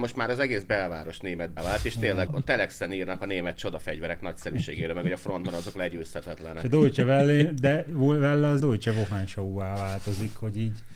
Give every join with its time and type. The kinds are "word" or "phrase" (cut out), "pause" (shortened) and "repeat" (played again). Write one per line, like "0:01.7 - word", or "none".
0:01.6 - word
0:02.3 - word
0:08.6 - word

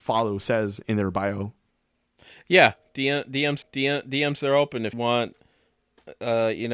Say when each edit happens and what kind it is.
0:03.6 - repeat
0:04.9 - word

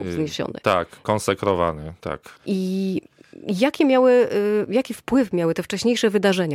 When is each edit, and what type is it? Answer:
0:02.4 - pause

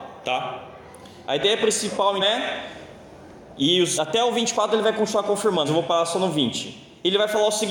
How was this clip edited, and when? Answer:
0:02.2 - word
0:04.0 - word
0:05.7 - word

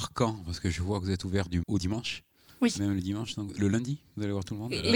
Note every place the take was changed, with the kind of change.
0:01.6 - word

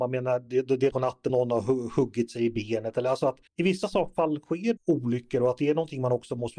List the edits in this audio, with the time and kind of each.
0:00.9 - word
0:01.3 - word
0:03.5 - pause
0:04.8 - word

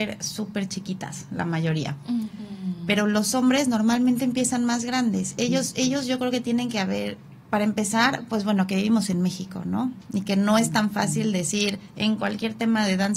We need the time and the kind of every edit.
none

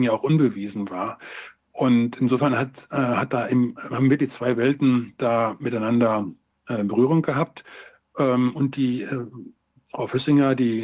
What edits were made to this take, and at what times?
none

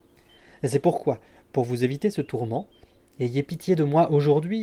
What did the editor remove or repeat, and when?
none

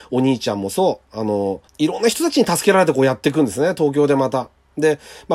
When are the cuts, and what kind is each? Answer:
0:01.7 - pause

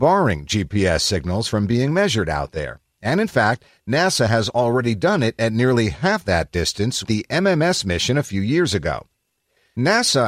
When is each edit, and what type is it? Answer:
0:07.0 - word

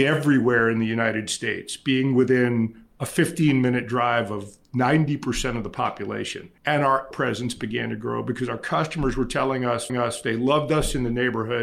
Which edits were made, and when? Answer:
0:06.6 - pause
0:07.1 - word
0:09.9 - repeat

